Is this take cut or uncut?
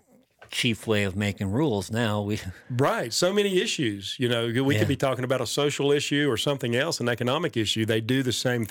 cut